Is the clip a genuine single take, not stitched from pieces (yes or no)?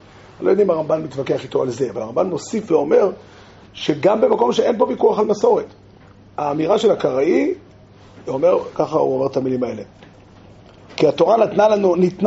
yes